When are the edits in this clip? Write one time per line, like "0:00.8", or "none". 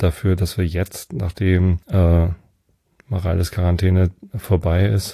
0:01.8